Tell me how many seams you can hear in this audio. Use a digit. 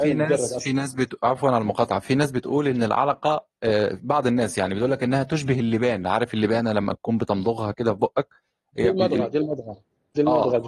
0